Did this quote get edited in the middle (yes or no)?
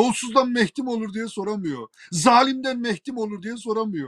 no